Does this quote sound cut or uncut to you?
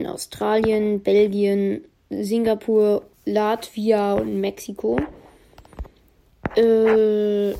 cut